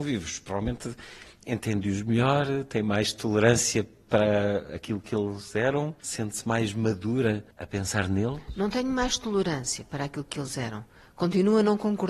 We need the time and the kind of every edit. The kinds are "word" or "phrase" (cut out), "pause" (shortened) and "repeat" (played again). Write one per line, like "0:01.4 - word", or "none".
0:06.0 - pause